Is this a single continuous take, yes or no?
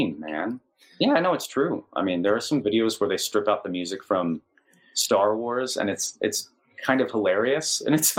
yes